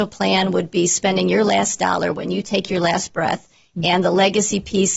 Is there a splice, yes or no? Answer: no